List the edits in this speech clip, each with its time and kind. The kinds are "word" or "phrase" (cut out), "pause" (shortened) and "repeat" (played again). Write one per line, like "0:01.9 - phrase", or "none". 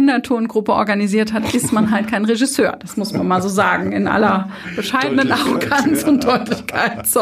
none

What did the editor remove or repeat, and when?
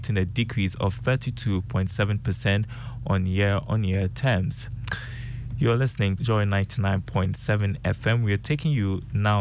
0:06.2 - word

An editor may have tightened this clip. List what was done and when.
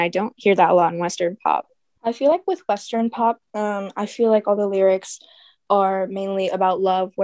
0:03.5 - pause

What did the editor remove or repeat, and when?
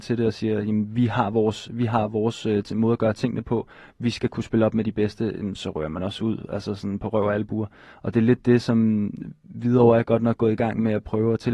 none

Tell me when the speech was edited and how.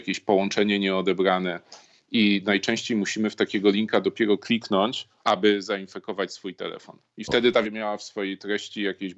0:05.2 - pause
0:07.6 - phrase

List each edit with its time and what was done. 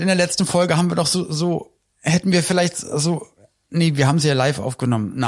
none

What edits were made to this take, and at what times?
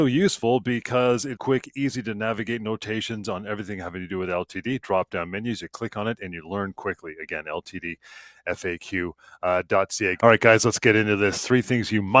0:01.4 - word

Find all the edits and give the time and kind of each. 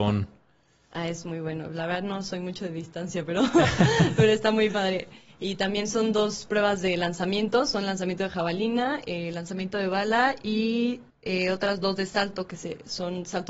0:11.1 - pause

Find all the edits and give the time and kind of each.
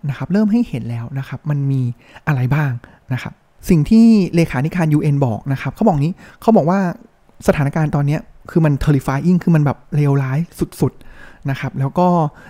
none

